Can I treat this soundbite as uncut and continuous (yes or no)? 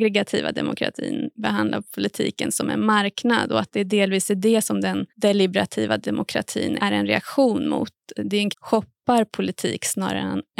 no